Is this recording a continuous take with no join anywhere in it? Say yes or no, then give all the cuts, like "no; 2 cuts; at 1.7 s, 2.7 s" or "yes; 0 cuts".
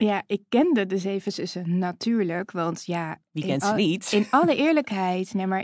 yes; 0 cuts